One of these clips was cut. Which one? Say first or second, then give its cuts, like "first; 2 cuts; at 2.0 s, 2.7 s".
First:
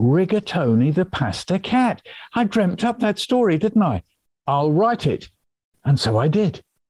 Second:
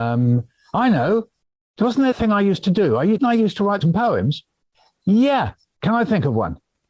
second; 3 cuts; at 2.1 s, 3.2 s, 3.8 s